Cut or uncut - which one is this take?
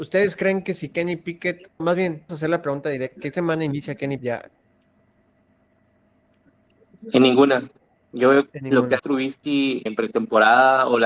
cut